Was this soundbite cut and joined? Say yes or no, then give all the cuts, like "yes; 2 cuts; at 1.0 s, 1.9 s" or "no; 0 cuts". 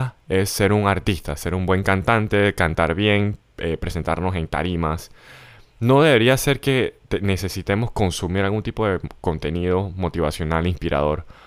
no; 0 cuts